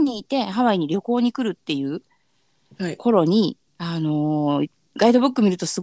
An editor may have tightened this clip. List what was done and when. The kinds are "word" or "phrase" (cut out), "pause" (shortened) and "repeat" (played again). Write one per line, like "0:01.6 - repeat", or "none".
0:03.7 - pause